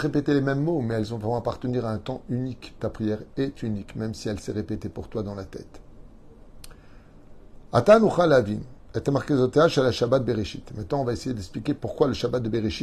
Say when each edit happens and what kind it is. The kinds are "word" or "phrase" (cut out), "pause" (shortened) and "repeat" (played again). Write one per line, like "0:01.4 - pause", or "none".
0:02.8 - word